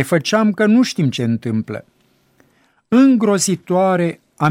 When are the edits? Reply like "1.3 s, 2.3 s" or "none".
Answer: 1.2 s